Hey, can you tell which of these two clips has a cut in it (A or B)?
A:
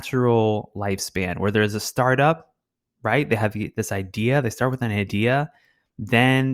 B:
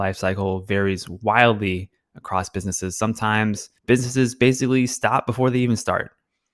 B